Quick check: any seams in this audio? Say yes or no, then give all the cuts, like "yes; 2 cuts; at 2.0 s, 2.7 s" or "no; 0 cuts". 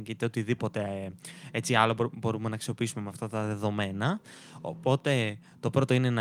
no; 0 cuts